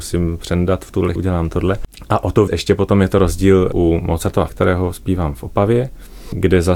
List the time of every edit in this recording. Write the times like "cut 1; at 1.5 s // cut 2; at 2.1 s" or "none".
cut 1; at 1.2 s // cut 2; at 2.5 s // cut 3; at 4.5 s